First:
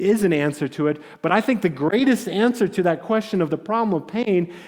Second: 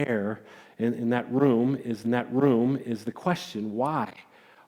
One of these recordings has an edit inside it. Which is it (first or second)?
second